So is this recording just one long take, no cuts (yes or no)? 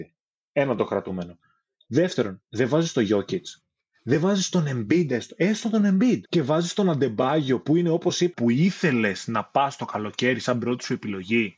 no